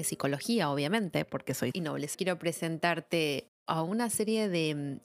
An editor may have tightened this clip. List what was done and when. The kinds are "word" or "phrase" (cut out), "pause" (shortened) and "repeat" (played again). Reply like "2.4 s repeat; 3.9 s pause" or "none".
1.7 s word; 2.1 s phrase